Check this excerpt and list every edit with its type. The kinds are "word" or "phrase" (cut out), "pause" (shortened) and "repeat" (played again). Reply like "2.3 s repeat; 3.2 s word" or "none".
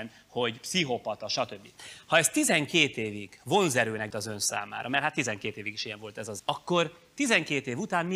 4.1 s word; 6.4 s word

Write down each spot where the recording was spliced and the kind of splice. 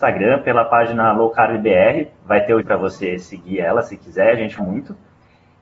2.6 s word; 4.6 s word

